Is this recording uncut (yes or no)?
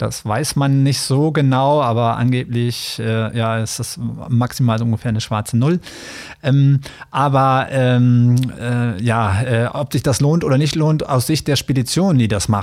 yes